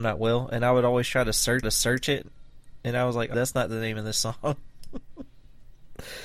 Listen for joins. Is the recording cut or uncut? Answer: cut